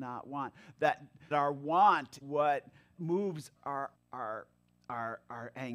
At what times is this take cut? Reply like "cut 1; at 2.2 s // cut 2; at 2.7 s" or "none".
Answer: cut 1; at 1.3 s // cut 2; at 2.2 s // cut 3; at 2.9 s // cut 4; at 3.6 s // cut 5; at 3.9 s

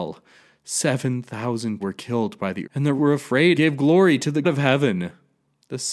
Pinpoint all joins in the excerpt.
cut 1; at 1.8 s // cut 2; at 2.6 s // cut 3; at 3.0 s // cut 4; at 3.6 s // cut 5; at 4.4 s

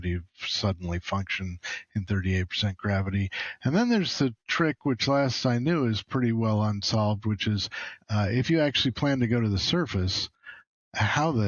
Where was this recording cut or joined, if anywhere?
cut 1; at 8.0 s

